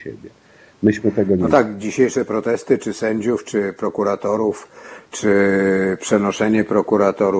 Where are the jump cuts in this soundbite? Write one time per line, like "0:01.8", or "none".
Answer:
0:01.8